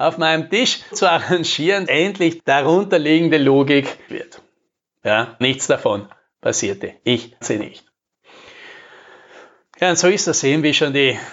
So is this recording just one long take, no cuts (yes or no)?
no